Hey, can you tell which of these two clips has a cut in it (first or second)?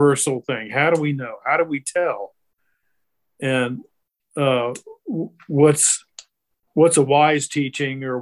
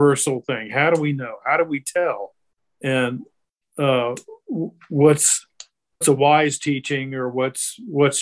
second